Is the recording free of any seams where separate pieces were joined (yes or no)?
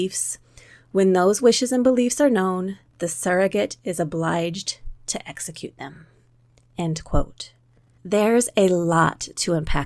yes